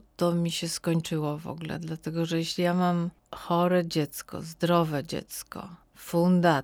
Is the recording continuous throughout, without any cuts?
yes; 0 cuts

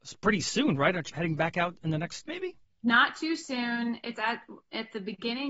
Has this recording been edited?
yes; 3 cuts; at 1.1 s, 2.3 s, 2.6 s

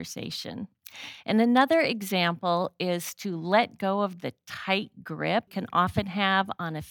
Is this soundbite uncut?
no; 1 cut; at 5.5 s

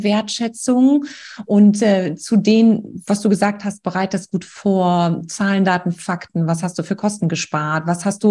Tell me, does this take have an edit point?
no; 0 cuts

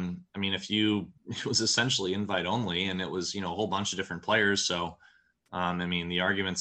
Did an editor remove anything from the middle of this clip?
yes; 1 cut; at 1.2 s

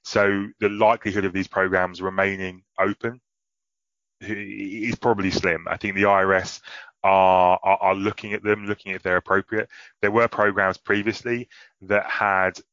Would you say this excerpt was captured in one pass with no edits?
yes; 0 cuts

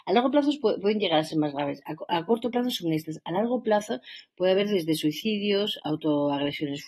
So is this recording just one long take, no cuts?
yes; 0 cuts

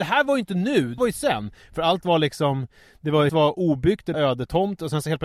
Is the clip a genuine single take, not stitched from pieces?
no; 3 cuts; at 1.0 s, 3.3 s, 4.1 s

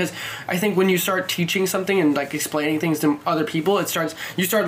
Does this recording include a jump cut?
no; 0 cuts

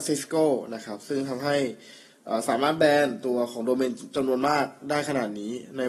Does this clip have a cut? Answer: no; 0 cuts

